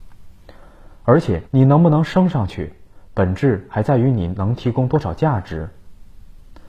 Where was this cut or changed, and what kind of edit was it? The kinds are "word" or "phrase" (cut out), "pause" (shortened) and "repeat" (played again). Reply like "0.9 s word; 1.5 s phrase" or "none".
1.5 s pause